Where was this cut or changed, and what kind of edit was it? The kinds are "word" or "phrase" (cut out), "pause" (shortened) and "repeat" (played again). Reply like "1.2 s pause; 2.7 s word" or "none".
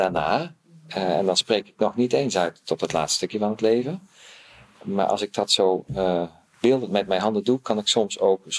none